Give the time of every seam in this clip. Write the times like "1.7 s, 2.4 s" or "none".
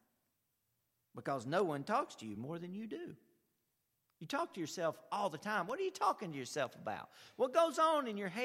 none